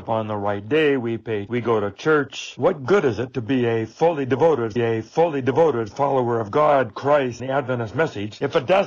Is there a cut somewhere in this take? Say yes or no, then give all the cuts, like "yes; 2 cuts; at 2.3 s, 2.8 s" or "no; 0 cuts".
yes; 3 cuts; at 1.5 s, 4.8 s, 7.4 s